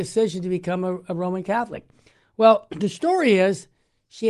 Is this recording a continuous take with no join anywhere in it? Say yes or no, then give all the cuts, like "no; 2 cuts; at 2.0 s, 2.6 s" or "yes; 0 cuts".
yes; 0 cuts